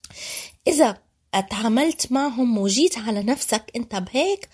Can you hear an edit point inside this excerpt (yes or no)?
no